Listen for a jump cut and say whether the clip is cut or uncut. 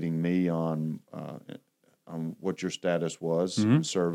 uncut